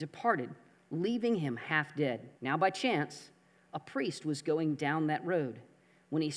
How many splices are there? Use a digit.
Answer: 1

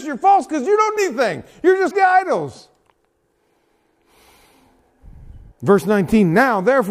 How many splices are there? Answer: 3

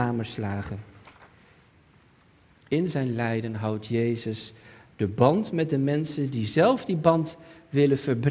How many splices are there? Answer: 0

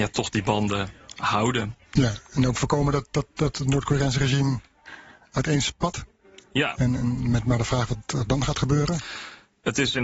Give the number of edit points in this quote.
1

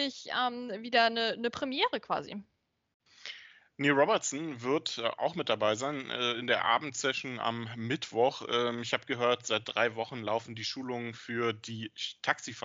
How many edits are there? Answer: 0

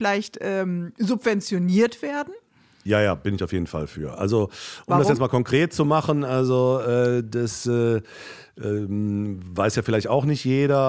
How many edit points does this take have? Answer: 0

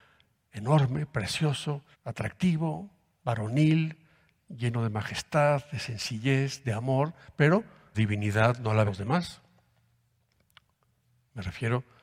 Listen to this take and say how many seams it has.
3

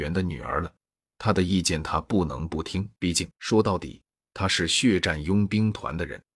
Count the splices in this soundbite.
2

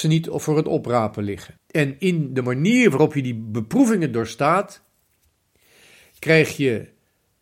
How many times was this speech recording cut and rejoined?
1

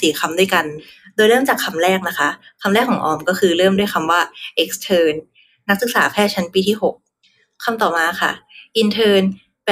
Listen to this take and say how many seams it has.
0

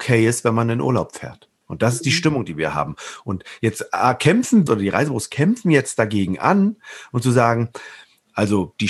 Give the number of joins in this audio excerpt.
2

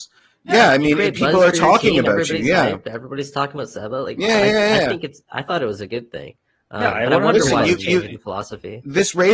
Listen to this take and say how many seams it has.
0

